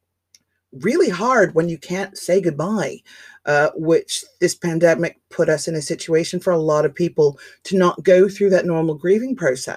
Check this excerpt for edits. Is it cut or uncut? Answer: uncut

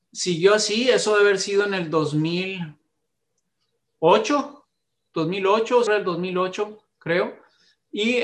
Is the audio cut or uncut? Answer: cut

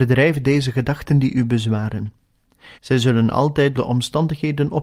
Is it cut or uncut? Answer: cut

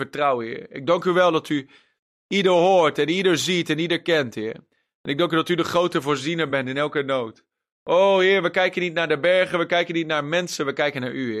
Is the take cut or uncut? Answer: uncut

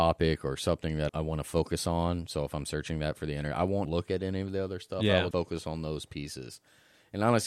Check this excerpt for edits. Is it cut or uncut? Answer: cut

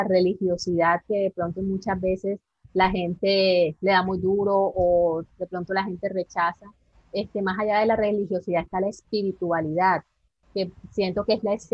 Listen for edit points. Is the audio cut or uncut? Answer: uncut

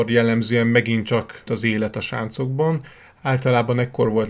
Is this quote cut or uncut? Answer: cut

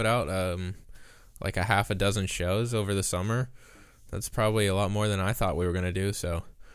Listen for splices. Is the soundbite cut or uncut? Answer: uncut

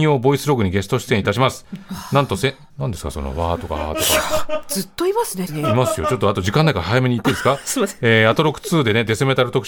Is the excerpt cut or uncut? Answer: cut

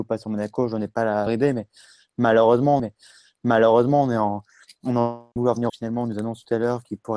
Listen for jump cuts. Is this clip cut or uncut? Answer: cut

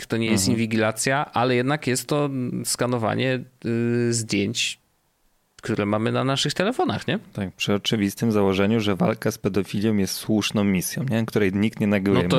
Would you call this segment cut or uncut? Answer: uncut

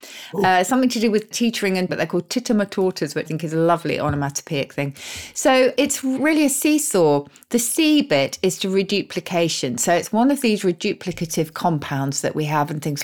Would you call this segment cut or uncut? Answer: cut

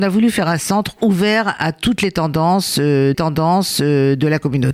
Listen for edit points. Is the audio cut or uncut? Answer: cut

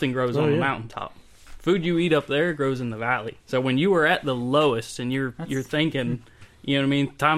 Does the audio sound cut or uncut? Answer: cut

